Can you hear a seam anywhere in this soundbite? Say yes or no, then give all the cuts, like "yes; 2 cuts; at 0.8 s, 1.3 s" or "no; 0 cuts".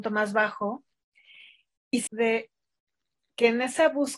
yes; 1 cut; at 2.1 s